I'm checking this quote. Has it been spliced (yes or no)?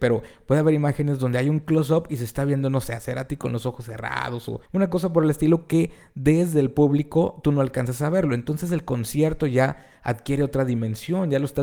yes